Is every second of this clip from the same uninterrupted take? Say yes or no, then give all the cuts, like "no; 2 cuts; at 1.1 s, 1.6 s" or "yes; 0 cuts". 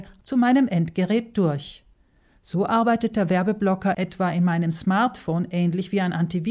yes; 0 cuts